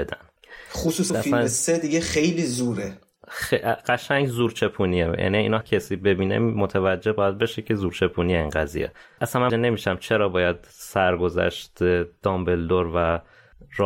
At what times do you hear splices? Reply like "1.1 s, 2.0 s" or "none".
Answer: 1.1 s, 5.6 s, 9.2 s, 9.5 s